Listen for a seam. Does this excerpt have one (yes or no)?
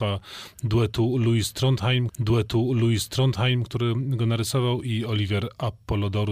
yes